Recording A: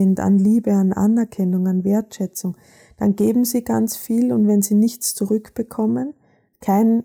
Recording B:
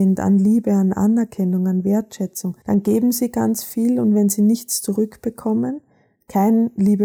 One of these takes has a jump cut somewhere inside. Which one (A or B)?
B